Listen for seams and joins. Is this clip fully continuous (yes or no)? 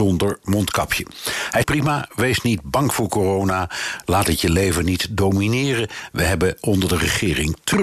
no